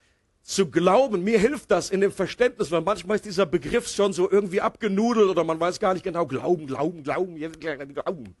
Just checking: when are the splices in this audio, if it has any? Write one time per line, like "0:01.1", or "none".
none